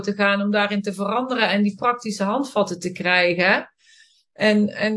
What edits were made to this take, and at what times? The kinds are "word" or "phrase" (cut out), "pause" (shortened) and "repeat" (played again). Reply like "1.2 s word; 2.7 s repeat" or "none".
none